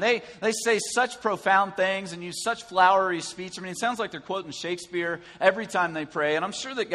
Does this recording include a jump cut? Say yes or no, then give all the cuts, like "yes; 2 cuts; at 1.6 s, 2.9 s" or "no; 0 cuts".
no; 0 cuts